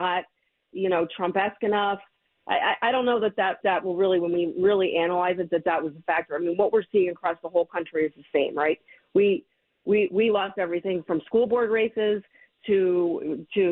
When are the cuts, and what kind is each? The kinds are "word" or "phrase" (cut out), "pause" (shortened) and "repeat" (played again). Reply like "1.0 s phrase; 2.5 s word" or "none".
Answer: 3.6 s word